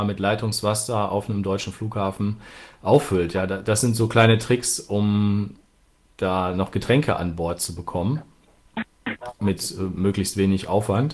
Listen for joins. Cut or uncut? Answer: uncut